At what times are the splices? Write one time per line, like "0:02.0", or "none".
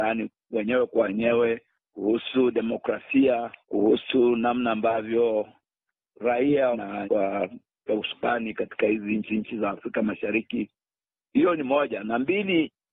0:01.7
0:03.6
0:06.7
0:07.0
0:07.9
0:09.3

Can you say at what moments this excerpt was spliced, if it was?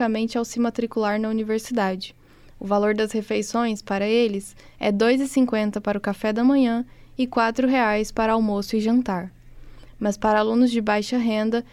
none

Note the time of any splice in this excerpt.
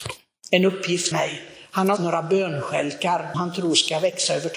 0:01.1
0:02.0
0:03.3

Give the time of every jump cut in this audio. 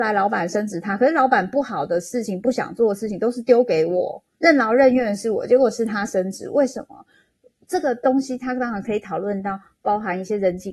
0:04.3

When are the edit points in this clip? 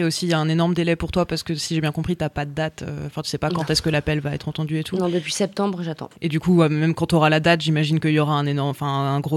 0:06.2

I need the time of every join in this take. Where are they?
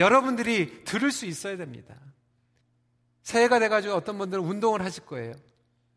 0:02.6

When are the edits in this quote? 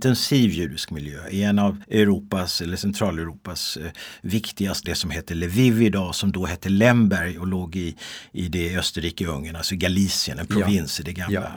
0:01.8
0:04.8

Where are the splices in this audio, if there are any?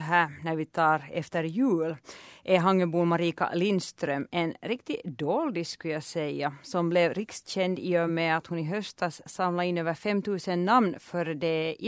none

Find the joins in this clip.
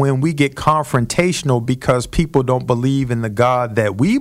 none

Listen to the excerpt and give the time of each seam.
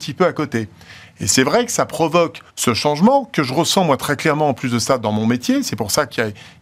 0:02.5

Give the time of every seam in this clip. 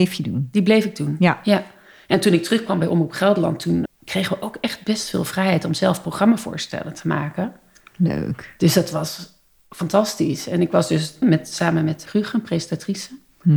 0:03.9
0:11.2
0:12.1

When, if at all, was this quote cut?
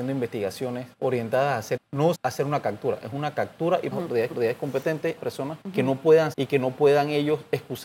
0:00.9
0:01.8
0:02.1
0:03.9
0:04.3
0:05.2
0:05.6
0:06.3

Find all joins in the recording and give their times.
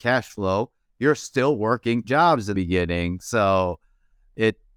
0:02.0
0:02.5

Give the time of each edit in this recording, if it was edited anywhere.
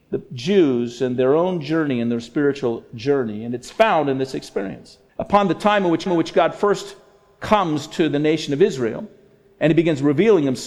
0:05.1
0:06.1

